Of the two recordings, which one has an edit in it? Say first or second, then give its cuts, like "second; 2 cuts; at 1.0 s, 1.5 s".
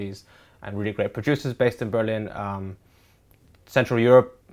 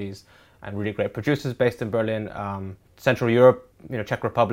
second; 1 cut; at 2.9 s